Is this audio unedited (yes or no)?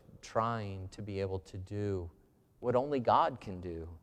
yes